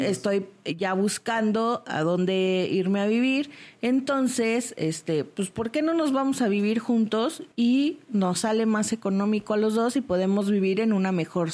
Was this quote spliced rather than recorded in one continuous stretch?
yes; 1 cut; at 7.5 s

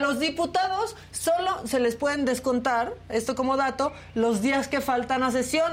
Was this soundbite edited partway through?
no; 0 cuts

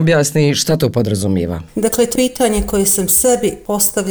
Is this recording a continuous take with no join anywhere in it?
no; 1 cut; at 2.2 s

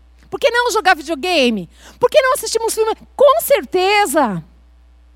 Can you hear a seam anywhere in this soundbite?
no; 0 cuts

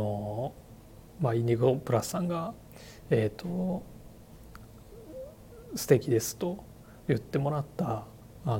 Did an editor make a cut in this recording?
no; 0 cuts

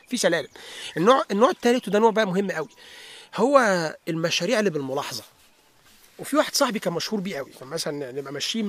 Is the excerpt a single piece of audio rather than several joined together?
yes; 0 cuts

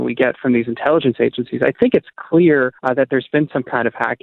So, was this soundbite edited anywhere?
yes; 1 cut; at 2.8 s

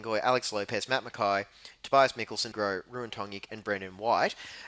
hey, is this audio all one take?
no; 1 cut; at 2.5 s

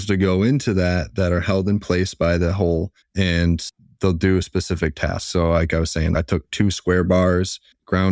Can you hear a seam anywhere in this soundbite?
no; 0 cuts

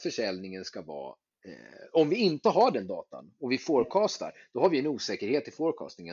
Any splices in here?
yes; 1 cut; at 1.3 s

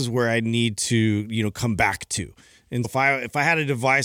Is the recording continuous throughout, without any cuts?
no; 1 cut; at 2.8 s

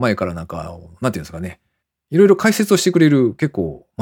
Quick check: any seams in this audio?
no; 0 cuts

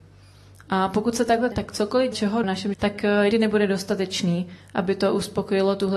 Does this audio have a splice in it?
yes; 5 cuts; at 1.5 s, 2.1 s, 2.4 s, 2.7 s, 3.3 s

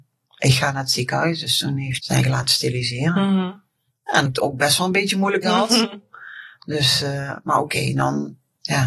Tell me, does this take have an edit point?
yes; 3 cuts; at 2.0 s, 4.3 s, 5.4 s

